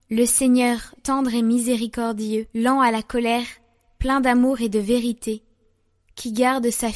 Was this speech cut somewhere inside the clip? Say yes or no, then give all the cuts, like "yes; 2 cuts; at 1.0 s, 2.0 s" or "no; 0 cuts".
yes; 2 cuts; at 1.0 s, 2.5 s